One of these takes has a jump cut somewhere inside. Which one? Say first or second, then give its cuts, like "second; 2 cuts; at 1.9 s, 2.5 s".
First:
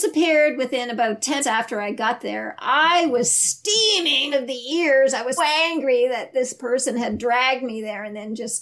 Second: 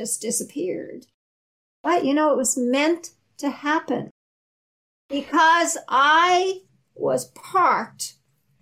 first; 3 cuts; at 1.4 s, 4.3 s, 5.4 s